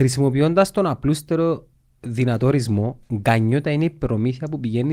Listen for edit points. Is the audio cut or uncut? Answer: uncut